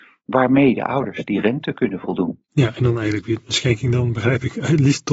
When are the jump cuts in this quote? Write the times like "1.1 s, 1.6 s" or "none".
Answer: 2.4 s